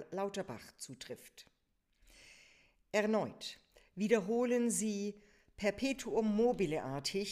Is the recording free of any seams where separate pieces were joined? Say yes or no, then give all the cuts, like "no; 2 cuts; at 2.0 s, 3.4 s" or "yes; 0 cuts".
yes; 0 cuts